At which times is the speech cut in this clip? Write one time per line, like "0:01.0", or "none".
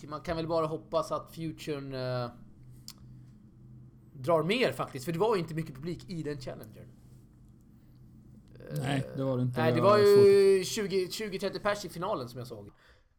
none